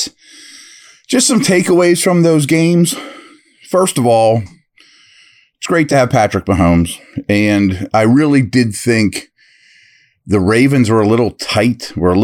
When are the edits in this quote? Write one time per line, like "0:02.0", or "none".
none